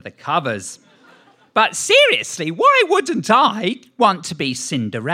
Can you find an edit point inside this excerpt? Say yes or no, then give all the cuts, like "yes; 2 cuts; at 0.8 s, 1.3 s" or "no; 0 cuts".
no; 0 cuts